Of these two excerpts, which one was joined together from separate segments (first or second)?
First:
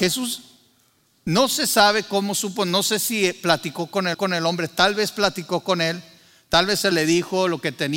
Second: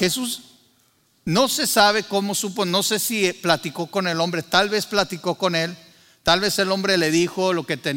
first